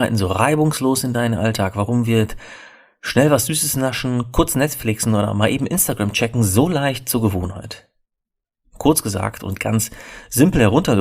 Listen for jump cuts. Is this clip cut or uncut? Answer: uncut